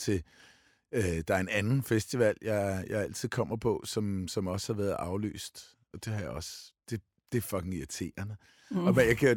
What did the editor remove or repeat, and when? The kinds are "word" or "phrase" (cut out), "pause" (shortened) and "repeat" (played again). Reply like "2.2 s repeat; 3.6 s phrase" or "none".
none